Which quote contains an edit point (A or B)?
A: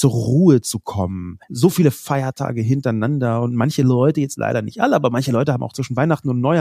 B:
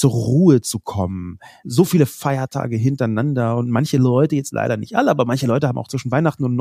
A